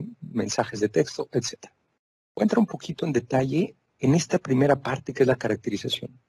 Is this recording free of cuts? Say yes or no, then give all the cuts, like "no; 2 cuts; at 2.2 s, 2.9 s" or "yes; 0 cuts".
no; 1 cut; at 2.0 s